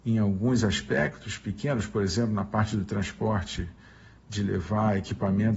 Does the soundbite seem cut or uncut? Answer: uncut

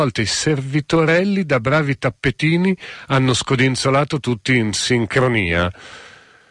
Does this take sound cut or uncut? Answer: uncut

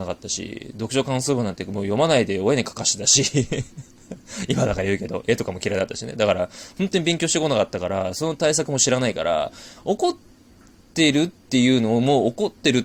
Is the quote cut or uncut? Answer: uncut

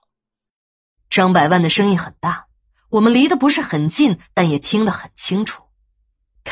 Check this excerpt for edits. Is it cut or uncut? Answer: uncut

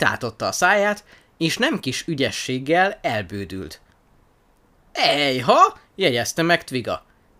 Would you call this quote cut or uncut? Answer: uncut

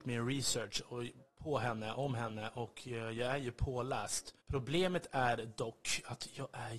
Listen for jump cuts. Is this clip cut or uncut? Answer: cut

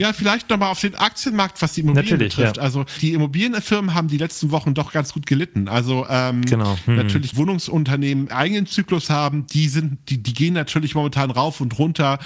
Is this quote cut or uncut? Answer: cut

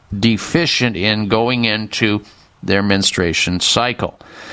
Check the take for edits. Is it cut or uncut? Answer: uncut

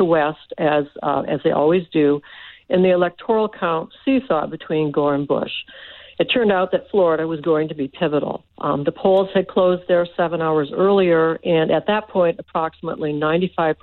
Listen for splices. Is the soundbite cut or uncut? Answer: cut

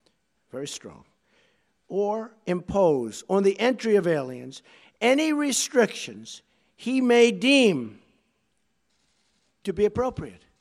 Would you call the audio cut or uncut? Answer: uncut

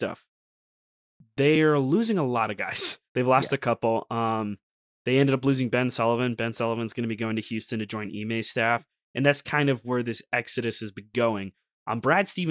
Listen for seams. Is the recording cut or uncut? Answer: uncut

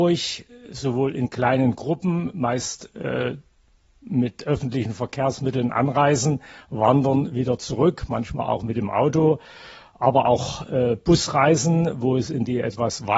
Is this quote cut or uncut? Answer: uncut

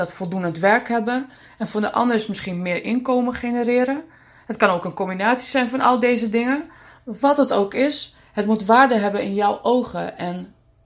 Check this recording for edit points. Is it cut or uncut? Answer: uncut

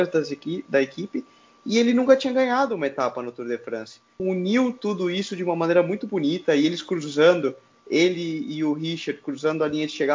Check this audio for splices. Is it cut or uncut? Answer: uncut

